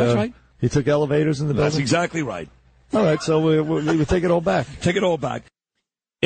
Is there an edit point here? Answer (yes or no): no